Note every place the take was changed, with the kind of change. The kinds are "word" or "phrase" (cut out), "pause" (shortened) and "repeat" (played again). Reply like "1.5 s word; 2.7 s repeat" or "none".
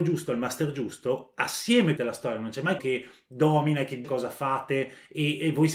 2.0 s word; 2.8 s word; 4.0 s word